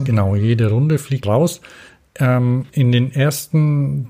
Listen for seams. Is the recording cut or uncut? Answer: cut